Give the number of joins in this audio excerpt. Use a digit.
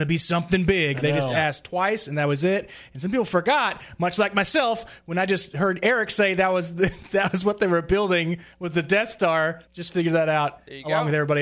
1